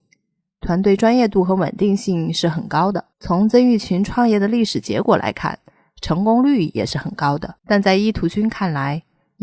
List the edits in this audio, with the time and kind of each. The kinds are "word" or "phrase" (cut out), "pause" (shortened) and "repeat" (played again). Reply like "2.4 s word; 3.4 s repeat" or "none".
3.1 s pause; 7.6 s pause